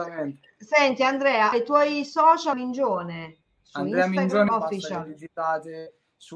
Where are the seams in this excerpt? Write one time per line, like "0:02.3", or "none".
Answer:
0:01.5
0:02.5
0:04.5